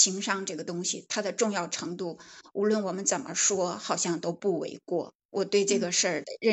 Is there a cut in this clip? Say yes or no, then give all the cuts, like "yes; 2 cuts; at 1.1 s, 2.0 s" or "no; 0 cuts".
yes; 1 cut; at 5.2 s